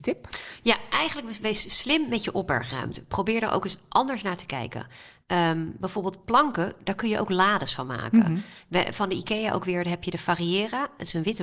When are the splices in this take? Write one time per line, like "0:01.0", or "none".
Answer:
none